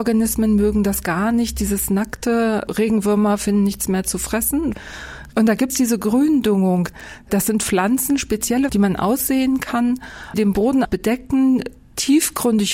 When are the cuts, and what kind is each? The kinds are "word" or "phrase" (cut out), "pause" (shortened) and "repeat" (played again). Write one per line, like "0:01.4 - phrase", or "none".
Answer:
0:02.7 - word
0:05.7 - word
0:08.7 - word
0:10.3 - word
0:10.8 - word